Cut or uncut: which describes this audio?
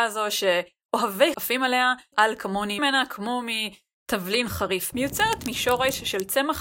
cut